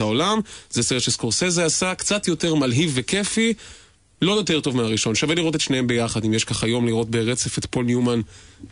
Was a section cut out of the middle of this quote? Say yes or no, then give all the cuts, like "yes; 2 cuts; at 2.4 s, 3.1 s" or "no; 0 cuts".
no; 0 cuts